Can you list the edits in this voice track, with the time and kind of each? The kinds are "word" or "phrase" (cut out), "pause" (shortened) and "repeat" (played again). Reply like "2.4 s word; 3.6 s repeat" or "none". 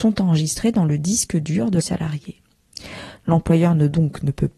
1.8 s phrase